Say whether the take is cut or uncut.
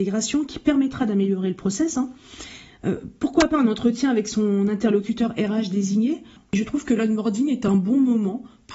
uncut